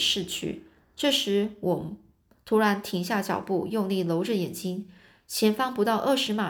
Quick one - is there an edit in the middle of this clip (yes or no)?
no